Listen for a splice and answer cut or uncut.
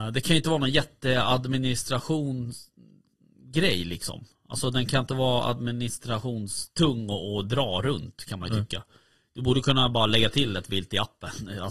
uncut